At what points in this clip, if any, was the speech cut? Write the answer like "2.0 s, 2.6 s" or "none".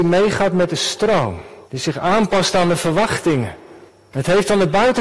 1.6 s, 3.9 s